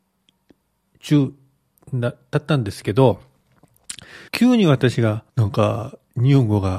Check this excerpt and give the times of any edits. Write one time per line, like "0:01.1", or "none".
0:04.3
0:05.3